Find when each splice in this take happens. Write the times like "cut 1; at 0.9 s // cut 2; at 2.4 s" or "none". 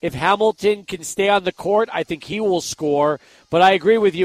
none